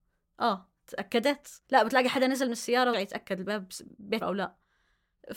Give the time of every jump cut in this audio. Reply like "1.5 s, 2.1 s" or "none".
1.6 s, 2.9 s, 4.2 s